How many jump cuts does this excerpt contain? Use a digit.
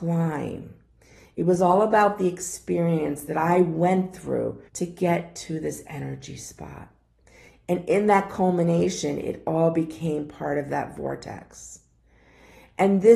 1